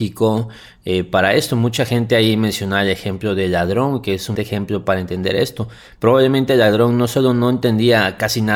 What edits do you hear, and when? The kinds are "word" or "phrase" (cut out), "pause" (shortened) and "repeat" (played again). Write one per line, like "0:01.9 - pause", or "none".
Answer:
0:04.3 - word

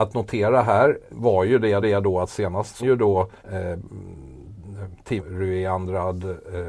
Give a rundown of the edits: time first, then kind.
0:01.1 - word
0:01.8 - repeat
0:02.8 - word
0:03.4 - pause
0:05.2 - phrase

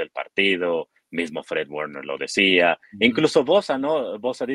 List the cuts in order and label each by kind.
none

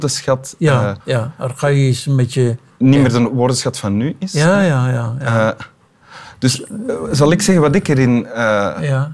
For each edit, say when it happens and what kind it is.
0:01.0 - pause
0:02.7 - pause

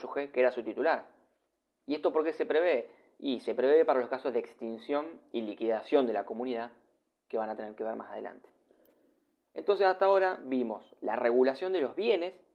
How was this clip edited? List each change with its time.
none

